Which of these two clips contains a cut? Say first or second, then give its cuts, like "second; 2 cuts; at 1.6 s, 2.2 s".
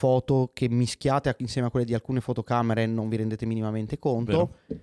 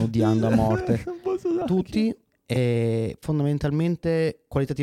second; 1 cut; at 1.6 s